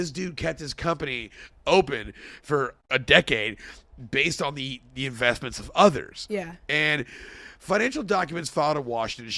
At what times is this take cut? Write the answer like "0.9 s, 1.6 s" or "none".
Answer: 2.8 s